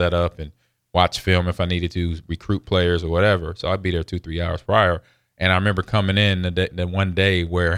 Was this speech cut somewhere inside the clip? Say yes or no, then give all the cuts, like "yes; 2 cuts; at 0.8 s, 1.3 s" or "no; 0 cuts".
no; 0 cuts